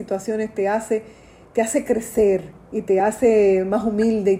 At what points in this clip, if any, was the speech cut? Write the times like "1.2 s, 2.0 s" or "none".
none